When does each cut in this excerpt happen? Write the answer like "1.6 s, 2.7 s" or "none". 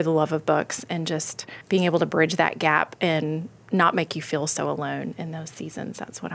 1.6 s